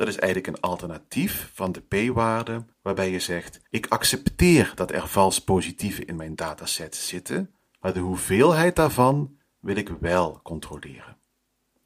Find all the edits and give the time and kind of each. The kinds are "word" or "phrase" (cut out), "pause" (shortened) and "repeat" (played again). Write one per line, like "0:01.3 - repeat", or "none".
0:02.7 - pause
0:03.7 - pause
0:07.6 - pause